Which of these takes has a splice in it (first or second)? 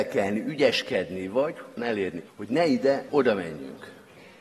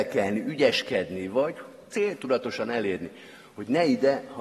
first